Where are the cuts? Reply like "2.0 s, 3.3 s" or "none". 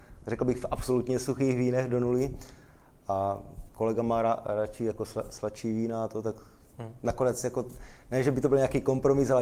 none